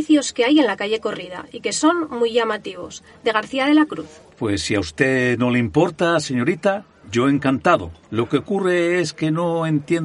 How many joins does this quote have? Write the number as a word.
two